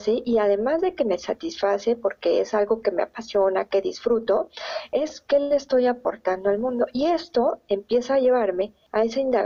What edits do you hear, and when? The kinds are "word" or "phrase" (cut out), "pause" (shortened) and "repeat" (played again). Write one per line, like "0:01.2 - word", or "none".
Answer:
none